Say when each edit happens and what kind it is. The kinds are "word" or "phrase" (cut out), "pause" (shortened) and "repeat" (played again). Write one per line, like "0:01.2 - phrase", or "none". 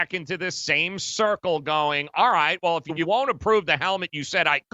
none